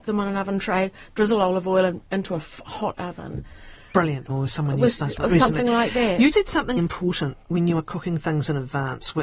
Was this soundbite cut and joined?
yes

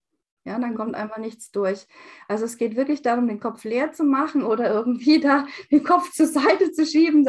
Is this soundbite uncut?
yes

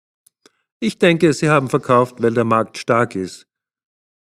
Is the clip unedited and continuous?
yes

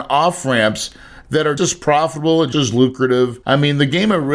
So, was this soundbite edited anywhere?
yes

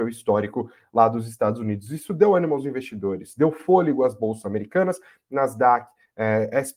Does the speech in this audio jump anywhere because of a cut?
no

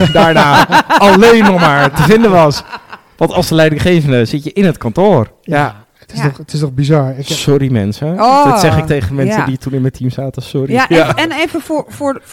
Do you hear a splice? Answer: no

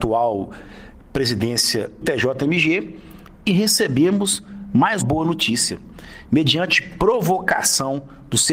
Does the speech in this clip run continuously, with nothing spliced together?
no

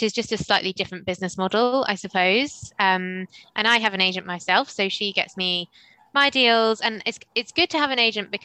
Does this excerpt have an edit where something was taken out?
no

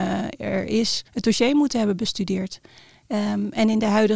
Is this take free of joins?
no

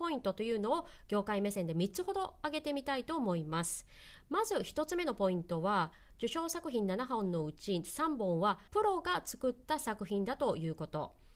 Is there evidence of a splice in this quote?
yes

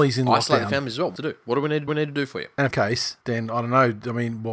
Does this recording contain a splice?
yes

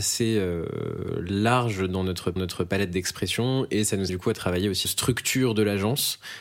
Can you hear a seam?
yes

